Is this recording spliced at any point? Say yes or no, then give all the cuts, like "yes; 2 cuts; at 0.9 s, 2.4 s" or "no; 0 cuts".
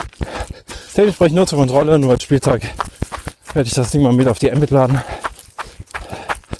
no; 0 cuts